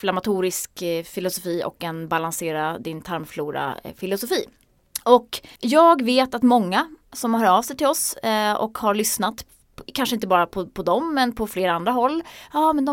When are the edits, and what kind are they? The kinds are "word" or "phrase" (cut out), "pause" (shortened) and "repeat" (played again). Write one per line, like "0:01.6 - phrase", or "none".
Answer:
0:05.5 - pause